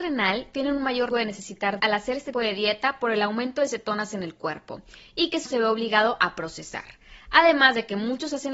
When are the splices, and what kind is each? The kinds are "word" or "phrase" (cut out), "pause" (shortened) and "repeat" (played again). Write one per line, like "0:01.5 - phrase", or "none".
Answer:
0:01.1 - word
0:01.8 - word
0:02.3 - word
0:05.5 - word